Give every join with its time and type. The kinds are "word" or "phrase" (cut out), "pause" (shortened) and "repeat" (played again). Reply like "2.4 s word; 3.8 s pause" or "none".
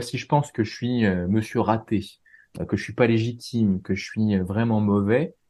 none